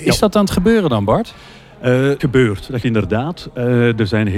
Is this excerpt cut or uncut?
cut